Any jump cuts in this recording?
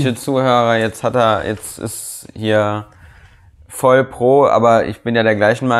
no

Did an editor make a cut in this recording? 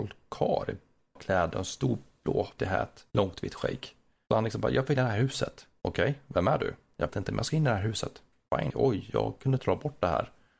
yes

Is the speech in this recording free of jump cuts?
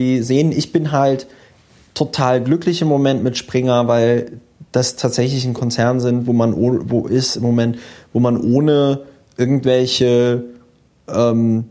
yes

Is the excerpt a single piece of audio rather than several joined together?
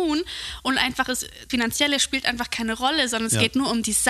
no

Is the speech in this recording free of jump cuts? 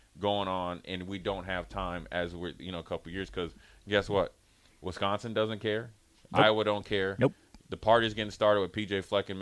yes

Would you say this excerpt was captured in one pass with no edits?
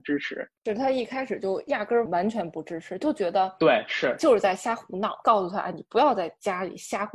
yes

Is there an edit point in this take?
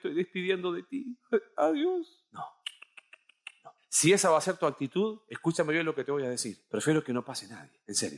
no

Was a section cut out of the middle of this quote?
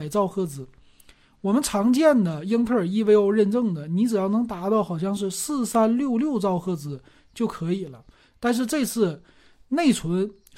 no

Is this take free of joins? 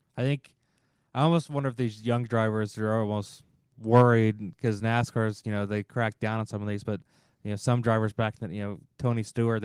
yes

